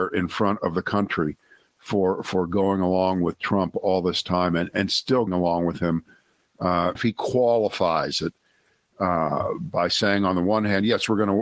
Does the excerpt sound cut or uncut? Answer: cut